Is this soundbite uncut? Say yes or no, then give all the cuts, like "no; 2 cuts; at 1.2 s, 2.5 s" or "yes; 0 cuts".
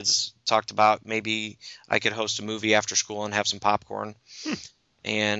yes; 0 cuts